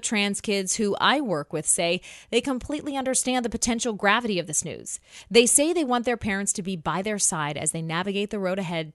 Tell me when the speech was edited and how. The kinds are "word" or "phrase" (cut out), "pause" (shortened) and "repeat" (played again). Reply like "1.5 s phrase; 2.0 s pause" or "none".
none